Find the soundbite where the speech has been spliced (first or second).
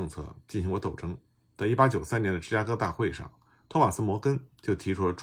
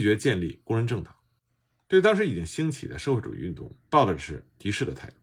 second